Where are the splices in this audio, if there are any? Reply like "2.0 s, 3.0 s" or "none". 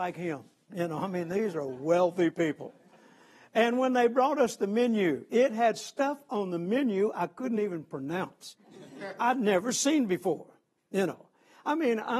none